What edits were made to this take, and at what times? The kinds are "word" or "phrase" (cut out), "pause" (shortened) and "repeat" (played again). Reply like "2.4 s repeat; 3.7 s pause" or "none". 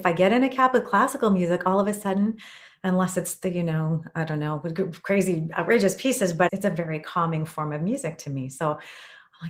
none